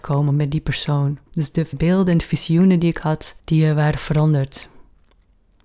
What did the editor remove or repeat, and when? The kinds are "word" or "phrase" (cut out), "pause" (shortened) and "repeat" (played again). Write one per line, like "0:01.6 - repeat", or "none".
0:01.3 - pause
0:01.7 - word
0:03.4 - pause